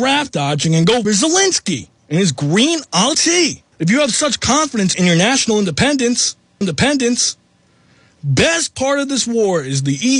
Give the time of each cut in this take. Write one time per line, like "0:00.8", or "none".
0:01.0
0:02.0
0:03.1
0:03.7
0:04.9
0:06.6